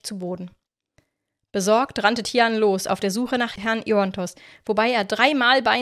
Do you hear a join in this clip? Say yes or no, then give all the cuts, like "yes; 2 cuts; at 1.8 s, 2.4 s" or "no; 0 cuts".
no; 0 cuts